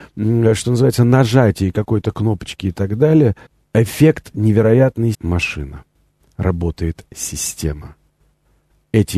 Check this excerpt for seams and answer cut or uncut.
cut